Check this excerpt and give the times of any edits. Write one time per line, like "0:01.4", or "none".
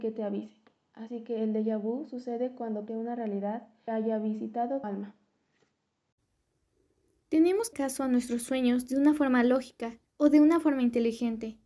0:02.9
0:03.9
0:04.8
0:07.7
0:10.1